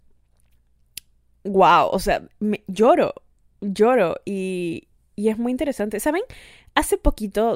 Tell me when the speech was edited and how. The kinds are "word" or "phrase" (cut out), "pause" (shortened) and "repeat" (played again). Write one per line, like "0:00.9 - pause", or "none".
none